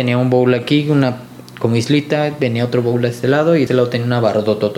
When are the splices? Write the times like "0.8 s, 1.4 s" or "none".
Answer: 3.7 s